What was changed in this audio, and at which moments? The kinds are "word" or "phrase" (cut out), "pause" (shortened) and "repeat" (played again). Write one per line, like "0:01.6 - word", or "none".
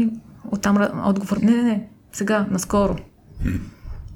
0:01.4 - word